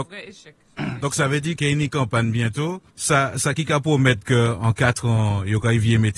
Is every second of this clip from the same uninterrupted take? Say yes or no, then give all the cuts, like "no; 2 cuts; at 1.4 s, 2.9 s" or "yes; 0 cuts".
no; 2 cuts; at 1.6 s, 2.9 s